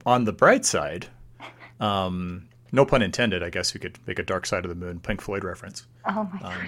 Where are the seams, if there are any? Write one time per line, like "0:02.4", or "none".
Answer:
none